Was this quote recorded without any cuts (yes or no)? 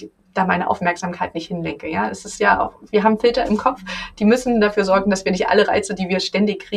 yes